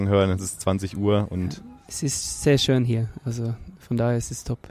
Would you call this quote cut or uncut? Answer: uncut